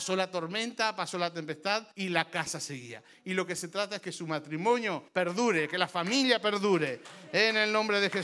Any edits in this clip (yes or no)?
yes